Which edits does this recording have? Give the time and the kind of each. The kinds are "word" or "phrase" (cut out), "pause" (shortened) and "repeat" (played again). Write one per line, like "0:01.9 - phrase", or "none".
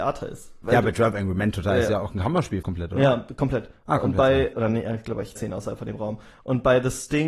0:02.6 - word
0:05.4 - word